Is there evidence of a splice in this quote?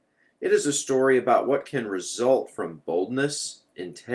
no; 0 cuts

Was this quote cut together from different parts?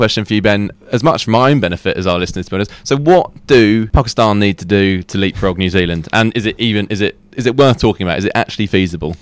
no; 0 cuts

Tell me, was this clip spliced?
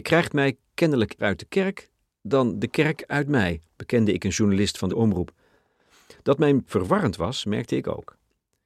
yes; 3 cuts; at 1.2 s, 4.9 s, 6.7 s

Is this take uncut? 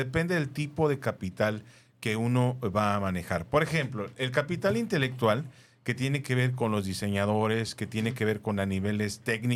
yes; 0 cuts

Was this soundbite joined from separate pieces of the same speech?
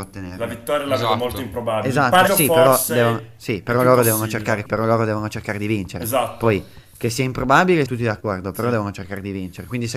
yes; 3 cuts; at 2.3 s, 4.7 s, 7.9 s

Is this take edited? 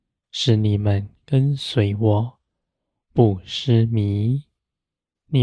no; 0 cuts

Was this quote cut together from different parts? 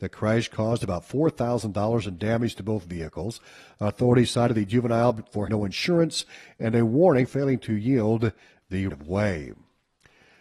yes; 3 cuts; at 5.5 s, 7.3 s, 8.9 s

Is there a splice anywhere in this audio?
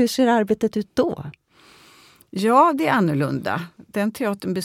no; 0 cuts

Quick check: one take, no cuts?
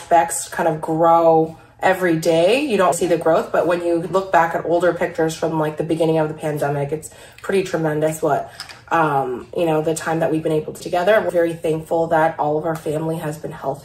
no; 3 cuts; at 2.9 s, 10.8 s, 11.3 s

